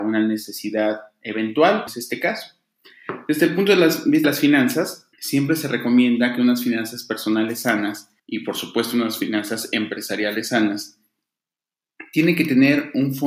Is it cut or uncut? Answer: cut